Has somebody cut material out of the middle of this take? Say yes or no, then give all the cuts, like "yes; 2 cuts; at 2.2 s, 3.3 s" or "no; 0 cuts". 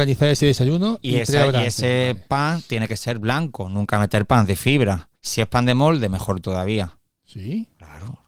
yes; 1 cut; at 5.2 s